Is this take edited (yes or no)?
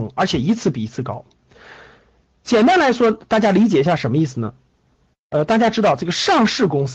no